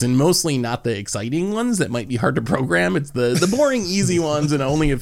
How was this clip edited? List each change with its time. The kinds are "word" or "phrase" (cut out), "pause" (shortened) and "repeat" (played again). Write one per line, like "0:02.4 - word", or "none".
none